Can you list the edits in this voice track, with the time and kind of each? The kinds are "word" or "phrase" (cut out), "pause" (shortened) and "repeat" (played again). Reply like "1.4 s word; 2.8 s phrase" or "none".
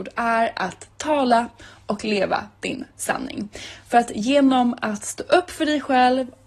none